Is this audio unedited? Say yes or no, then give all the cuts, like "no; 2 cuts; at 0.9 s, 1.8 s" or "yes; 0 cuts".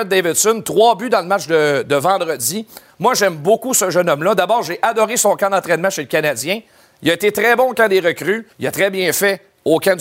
no; 1 cut; at 8.5 s